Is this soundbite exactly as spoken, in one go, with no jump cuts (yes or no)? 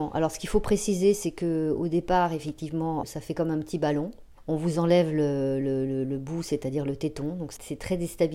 yes